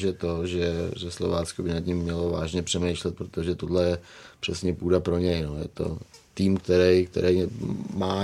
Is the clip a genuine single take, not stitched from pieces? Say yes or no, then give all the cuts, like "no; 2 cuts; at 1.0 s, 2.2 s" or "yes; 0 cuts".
yes; 0 cuts